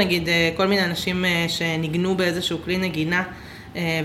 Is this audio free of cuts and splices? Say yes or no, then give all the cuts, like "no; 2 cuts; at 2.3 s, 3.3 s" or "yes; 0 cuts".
yes; 0 cuts